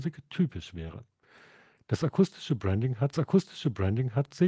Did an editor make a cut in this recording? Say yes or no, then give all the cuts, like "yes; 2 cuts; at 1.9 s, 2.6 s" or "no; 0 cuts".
yes; 1 cut; at 3.1 s